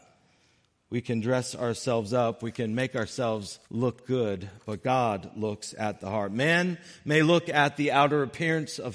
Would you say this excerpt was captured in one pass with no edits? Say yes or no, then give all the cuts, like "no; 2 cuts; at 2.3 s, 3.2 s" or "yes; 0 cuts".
no; 1 cut; at 3.6 s